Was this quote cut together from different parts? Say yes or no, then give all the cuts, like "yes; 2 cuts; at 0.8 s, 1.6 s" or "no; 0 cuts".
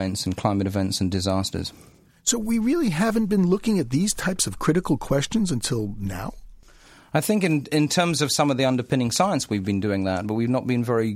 no; 0 cuts